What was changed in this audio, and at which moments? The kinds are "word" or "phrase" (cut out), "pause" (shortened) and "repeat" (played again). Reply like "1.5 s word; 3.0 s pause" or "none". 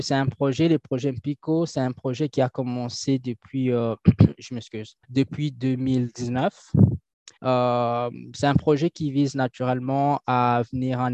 5.0 s pause; 7.4 s pause